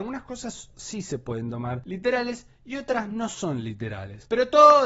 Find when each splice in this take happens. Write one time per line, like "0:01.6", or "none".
none